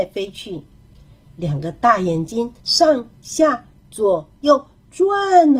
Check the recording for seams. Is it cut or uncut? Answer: cut